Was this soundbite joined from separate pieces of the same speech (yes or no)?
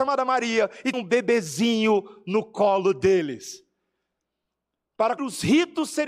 yes